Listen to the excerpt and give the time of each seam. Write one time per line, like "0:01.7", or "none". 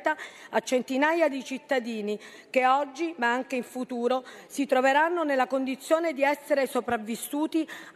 0:01.3